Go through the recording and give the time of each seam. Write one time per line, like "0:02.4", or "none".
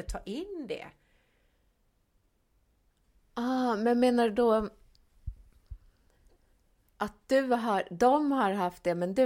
none